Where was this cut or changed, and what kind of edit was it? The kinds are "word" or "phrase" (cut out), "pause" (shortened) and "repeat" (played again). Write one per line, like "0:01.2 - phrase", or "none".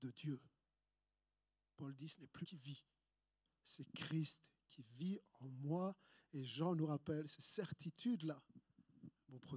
0:02.4 - word